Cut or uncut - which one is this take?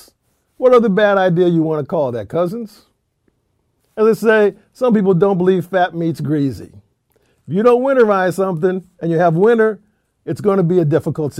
uncut